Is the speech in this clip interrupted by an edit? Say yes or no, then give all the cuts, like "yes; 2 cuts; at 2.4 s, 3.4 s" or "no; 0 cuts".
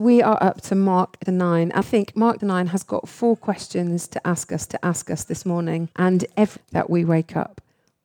yes; 6 cuts; at 1.3 s, 1.8 s, 2.4 s, 4.7 s, 5.9 s, 6.6 s